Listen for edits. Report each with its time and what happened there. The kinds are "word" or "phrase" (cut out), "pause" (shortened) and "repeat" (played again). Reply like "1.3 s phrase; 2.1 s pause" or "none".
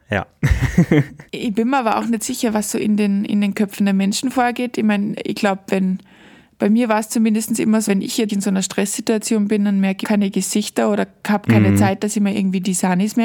1.3 s pause; 7.9 s word; 8.3 s word; 10.0 s phrase